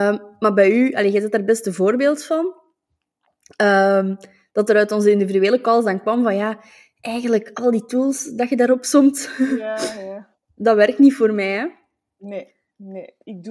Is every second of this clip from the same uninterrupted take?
no; 1 cut; at 10.4 s

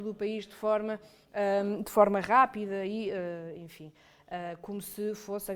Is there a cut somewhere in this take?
no; 0 cuts

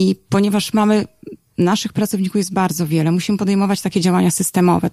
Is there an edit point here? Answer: no; 0 cuts

